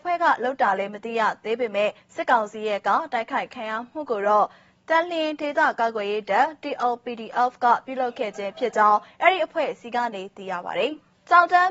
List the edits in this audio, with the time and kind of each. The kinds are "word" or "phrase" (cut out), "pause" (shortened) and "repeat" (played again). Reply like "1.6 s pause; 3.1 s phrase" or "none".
none

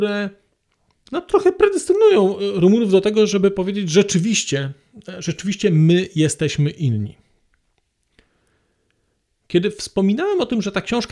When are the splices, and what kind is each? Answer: none

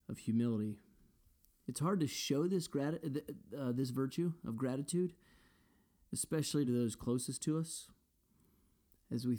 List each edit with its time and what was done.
none

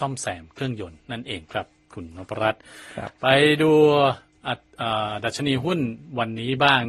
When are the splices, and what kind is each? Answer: none

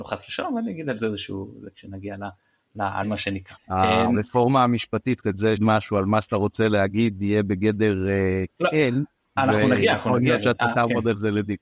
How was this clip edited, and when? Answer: 3.0 s word; 5.2 s word; 5.6 s word; 8.6 s word

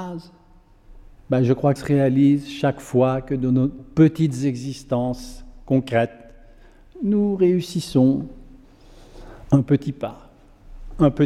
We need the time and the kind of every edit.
1.8 s word

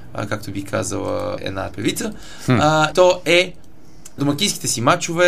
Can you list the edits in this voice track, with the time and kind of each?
1.4 s word; 1.7 s word; 2.9 s word; 4.2 s word

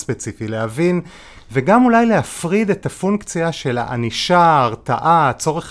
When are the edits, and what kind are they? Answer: none

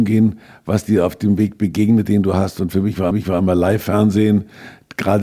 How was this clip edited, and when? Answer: 3.1 s repeat

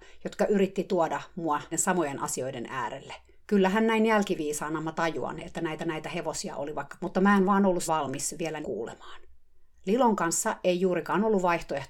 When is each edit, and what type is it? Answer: 1.7 s word; 3.3 s pause; 5.8 s repeat; 7.0 s word; 7.9 s word; 8.6 s phrase

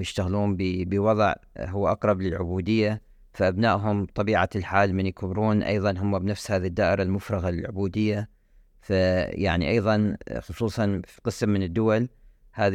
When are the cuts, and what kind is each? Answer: none

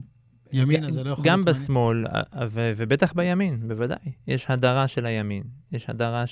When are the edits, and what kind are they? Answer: none

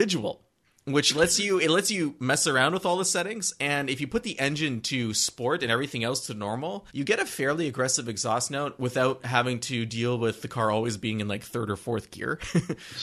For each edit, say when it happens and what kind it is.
6.9 s pause

